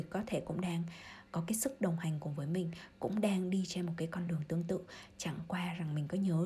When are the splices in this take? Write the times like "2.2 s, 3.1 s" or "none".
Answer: none